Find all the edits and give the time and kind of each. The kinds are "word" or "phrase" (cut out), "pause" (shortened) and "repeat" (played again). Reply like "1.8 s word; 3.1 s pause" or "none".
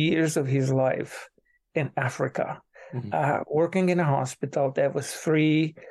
none